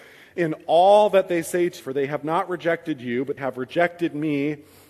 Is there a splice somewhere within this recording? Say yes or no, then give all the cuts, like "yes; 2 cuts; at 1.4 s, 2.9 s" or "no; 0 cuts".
yes; 2 cuts; at 1.8 s, 3.4 s